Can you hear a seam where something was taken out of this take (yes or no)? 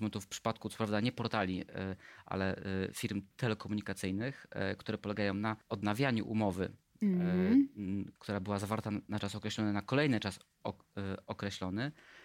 yes